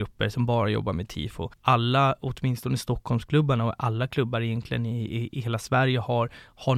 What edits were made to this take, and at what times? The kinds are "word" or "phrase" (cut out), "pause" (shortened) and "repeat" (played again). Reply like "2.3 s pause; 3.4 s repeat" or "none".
1.5 s pause